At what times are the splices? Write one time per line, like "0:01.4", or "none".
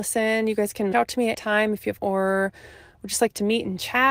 0:00.9
0:01.3
0:02.0